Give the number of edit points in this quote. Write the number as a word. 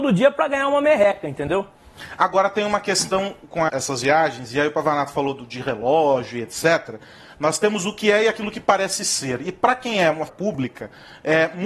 two